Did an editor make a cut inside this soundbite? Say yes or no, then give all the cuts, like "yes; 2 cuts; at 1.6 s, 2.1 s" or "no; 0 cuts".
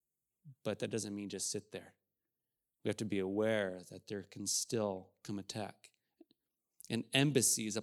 no; 0 cuts